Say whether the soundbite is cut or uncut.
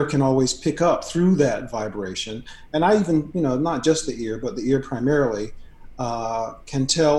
uncut